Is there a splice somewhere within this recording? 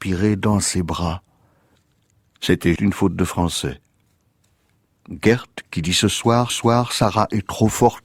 yes; 2 cuts; at 2.8 s, 6.5 s

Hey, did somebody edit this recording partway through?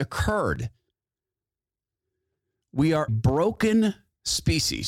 yes; 1 cut; at 3.1 s

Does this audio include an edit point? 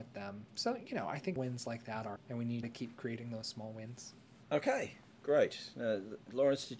yes; 3 cuts; at 1.4 s, 2.2 s, 2.6 s

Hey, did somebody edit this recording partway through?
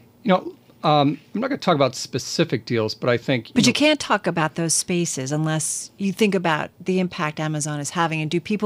no; 0 cuts

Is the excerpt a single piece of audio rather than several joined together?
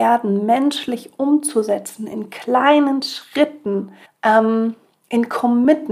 no; 1 cut; at 4.0 s

